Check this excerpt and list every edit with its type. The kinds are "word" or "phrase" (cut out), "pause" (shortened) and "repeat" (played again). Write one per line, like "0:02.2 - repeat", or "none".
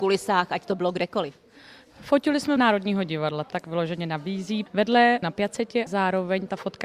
0:02.6 - word
0:03.5 - word
0:05.2 - word
0:05.9 - word